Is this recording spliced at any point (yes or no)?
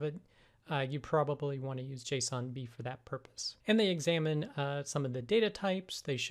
yes